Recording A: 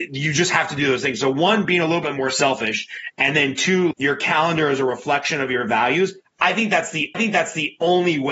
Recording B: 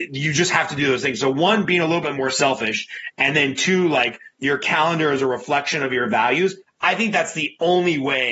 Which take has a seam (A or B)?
A